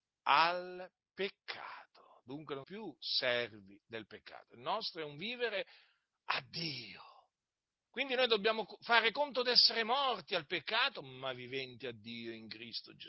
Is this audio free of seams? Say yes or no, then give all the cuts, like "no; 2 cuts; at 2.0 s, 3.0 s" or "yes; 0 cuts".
no; 1 cut; at 2.6 s